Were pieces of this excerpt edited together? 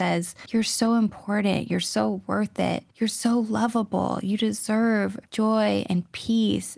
no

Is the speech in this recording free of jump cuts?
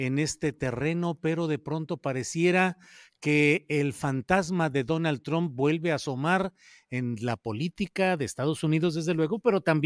yes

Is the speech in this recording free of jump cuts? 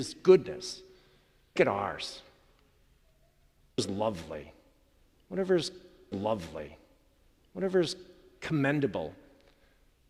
no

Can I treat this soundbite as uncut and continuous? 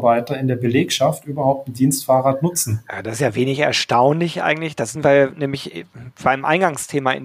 yes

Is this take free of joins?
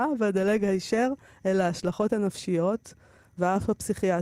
yes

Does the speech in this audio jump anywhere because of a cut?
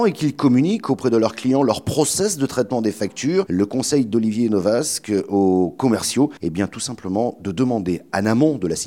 yes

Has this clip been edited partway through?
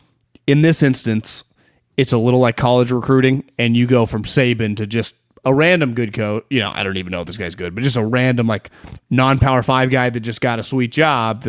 no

